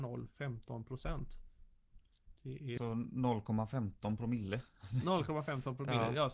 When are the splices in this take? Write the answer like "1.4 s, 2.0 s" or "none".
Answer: 2.4 s, 2.8 s

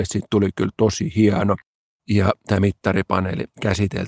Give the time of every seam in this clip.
none

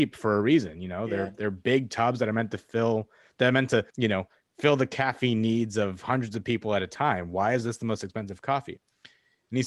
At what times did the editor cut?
3.9 s

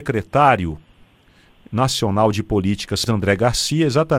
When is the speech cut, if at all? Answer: 3.1 s

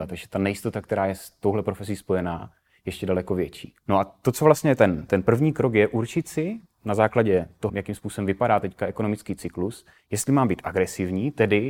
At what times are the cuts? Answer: 3.8 s, 5.1 s, 7.7 s

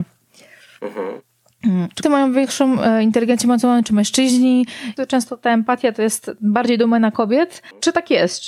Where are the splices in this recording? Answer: 2.0 s

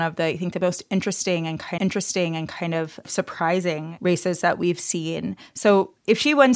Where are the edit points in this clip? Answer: 1.8 s

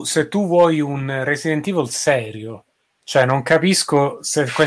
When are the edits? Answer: none

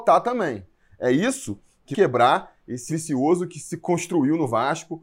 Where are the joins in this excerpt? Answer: 1.9 s, 2.9 s

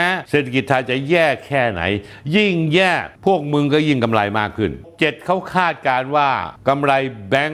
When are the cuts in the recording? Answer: 4.8 s

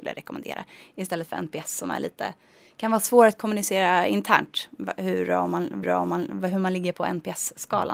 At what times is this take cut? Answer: 5.8 s

